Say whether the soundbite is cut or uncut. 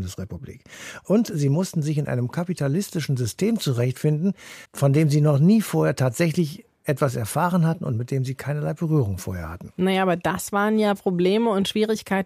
cut